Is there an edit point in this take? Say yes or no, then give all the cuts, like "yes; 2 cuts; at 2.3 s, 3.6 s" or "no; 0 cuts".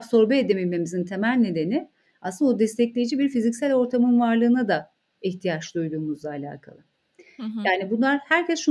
no; 0 cuts